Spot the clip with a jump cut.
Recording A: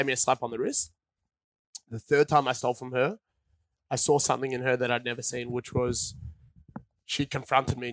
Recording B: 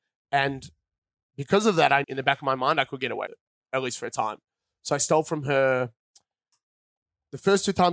B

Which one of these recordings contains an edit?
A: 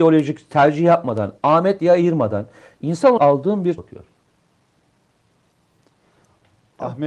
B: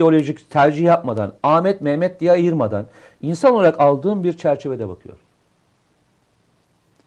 A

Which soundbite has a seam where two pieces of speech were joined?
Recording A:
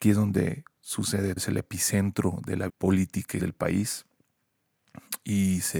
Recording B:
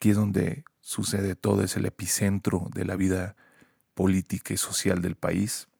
A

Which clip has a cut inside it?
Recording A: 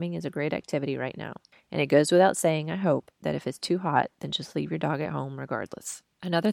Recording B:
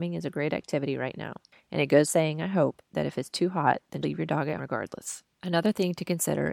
B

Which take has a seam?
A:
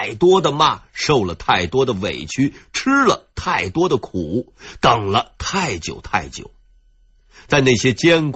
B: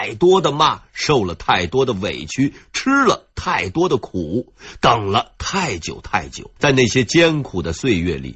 B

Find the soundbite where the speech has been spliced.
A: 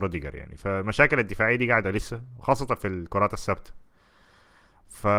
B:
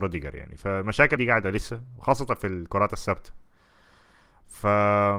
B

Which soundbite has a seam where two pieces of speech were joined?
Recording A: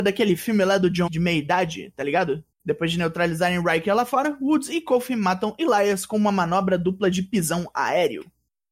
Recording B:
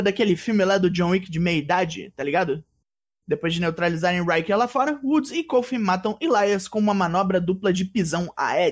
A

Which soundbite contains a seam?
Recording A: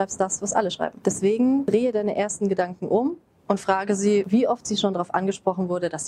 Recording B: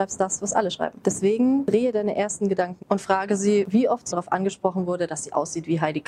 B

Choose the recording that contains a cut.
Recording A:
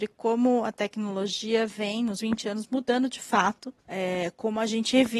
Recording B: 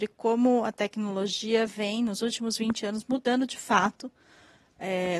A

